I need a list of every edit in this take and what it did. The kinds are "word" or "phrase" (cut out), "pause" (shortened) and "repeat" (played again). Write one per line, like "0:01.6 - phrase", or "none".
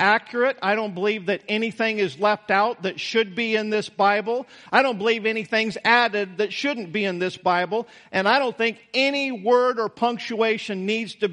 none